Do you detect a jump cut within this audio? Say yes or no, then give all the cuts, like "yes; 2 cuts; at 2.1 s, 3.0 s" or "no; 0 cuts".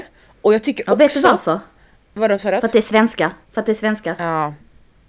yes; 1 cut; at 3.4 s